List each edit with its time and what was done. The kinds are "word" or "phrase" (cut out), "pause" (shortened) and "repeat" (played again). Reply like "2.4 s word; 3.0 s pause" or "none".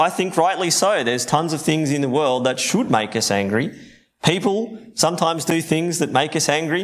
none

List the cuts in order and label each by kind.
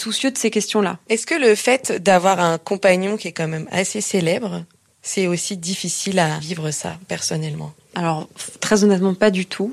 none

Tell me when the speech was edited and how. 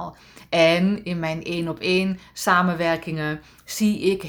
none

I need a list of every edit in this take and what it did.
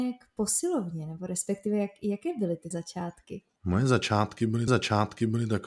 2.7 s word; 4.7 s repeat

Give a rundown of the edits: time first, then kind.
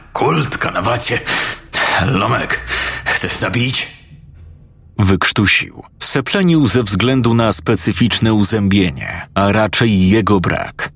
3.4 s word; 5.9 s pause; 9.3 s pause

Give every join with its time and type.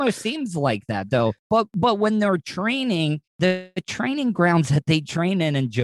1.4 s pause; 3.3 s pause

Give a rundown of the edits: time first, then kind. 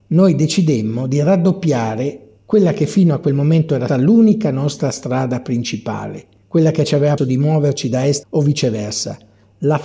2.4 s pause; 3.9 s word; 7.2 s word; 8.2 s phrase

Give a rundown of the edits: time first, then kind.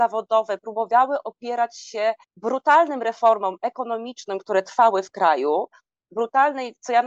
2.2 s pause

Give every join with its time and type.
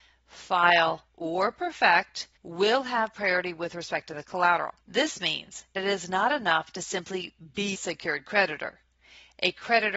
1.1 s pause; 2.4 s pause; 4.8 s pause; 5.7 s word; 7.7 s word

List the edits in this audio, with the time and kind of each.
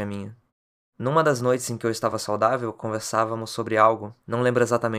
none

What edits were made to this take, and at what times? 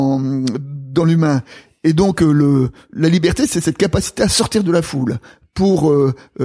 none

